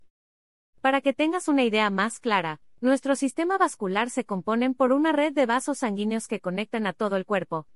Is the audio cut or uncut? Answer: uncut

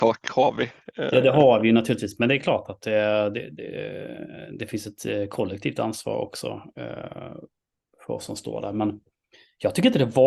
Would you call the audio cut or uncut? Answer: uncut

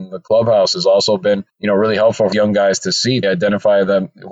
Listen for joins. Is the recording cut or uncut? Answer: cut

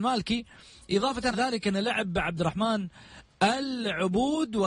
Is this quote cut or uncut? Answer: cut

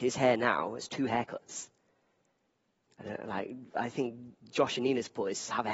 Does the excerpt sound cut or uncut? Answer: uncut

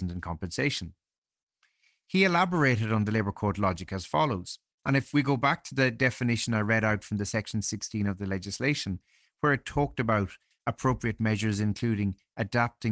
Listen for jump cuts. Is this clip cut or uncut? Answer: uncut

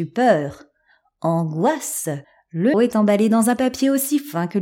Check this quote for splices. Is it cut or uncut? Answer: cut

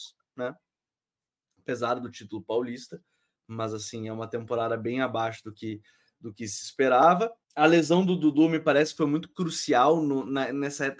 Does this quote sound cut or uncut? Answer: cut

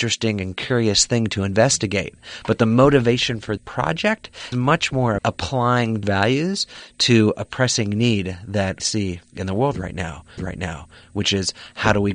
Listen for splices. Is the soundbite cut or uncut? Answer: cut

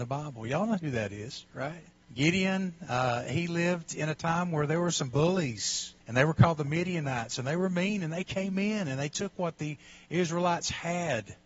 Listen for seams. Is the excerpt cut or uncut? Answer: cut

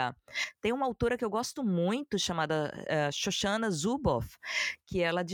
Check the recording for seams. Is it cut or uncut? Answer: uncut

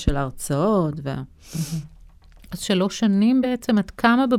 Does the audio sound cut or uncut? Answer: uncut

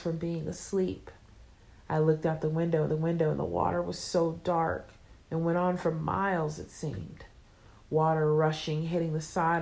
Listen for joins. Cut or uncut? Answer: cut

